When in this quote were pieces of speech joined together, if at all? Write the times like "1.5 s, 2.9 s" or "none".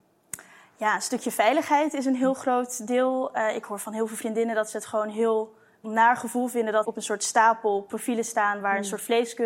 5.8 s, 6.8 s